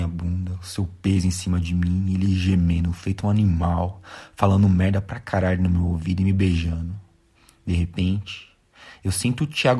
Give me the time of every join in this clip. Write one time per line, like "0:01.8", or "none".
none